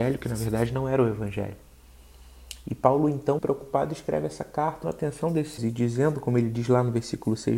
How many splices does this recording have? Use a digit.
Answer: 3